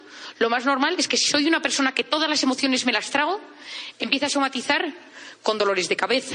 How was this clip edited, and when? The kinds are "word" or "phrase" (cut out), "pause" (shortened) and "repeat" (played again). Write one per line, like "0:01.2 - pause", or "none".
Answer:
none